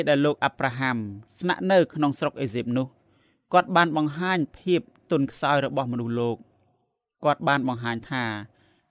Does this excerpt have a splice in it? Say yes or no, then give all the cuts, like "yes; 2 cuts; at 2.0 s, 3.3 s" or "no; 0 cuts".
no; 0 cuts